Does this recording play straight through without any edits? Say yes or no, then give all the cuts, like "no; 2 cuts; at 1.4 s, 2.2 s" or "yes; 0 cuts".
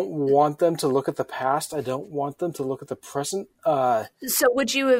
yes; 0 cuts